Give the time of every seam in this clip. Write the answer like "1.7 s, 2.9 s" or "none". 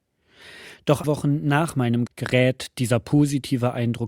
1.0 s, 2.1 s